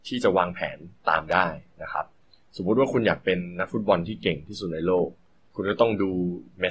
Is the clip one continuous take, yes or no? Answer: yes